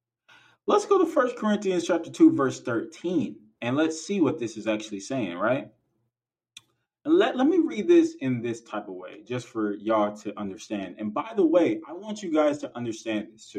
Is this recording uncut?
yes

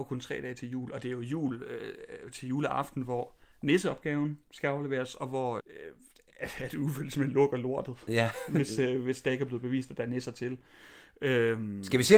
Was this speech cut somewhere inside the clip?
yes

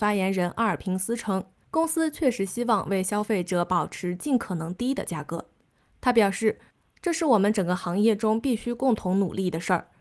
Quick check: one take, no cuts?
yes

